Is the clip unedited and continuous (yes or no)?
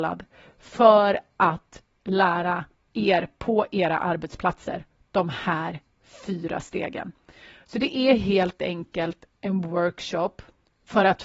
yes